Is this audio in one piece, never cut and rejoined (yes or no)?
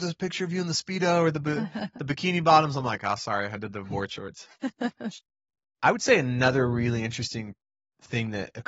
yes